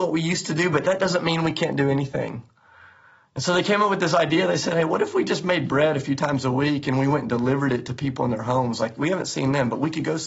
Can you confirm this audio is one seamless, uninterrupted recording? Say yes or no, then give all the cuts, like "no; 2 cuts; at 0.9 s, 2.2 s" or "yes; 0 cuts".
yes; 0 cuts